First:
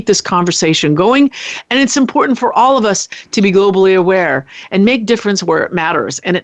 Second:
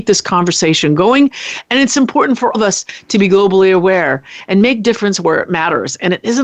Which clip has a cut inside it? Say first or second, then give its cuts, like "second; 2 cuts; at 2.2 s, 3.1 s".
second; 1 cut; at 2.5 s